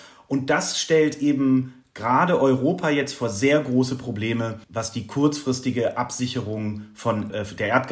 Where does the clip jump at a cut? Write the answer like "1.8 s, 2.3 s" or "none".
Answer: 4.6 s